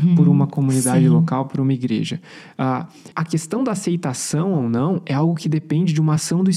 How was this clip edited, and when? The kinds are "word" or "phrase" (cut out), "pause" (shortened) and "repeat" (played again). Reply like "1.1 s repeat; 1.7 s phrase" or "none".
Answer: 3.1 s word